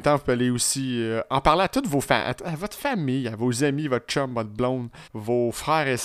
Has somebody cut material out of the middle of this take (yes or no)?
yes